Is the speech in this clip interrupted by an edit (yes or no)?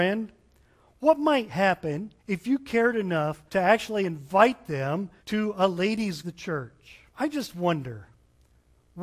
yes